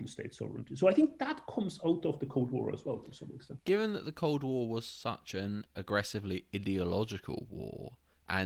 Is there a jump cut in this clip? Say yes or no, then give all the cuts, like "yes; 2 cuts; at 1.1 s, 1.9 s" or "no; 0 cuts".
no; 0 cuts